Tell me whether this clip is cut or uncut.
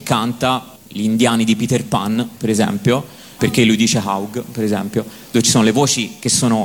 cut